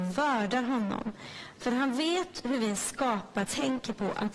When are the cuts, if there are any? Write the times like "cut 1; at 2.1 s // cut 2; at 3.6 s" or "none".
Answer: cut 1; at 3.4 s